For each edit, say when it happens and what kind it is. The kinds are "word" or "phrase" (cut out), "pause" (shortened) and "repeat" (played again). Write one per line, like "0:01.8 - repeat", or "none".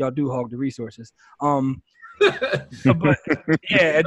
none